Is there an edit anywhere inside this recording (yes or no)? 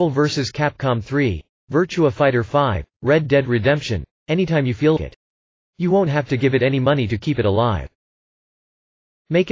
yes